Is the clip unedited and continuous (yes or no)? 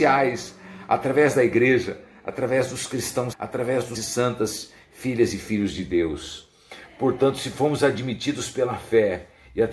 no